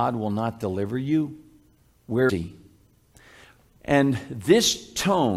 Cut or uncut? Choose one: cut